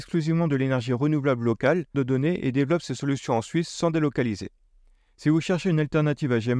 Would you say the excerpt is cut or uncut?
cut